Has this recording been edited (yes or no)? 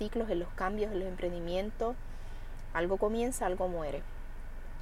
no